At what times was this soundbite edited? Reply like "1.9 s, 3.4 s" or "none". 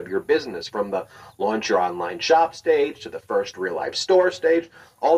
none

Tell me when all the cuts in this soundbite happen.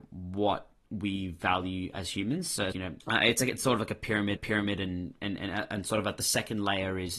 2.7 s, 4.4 s

